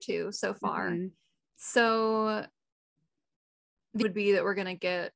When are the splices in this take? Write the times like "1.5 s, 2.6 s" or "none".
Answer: 4.0 s